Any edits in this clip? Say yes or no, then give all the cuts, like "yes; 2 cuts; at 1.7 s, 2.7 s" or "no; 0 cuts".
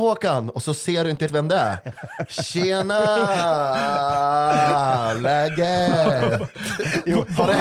yes; 1 cut; at 1.3 s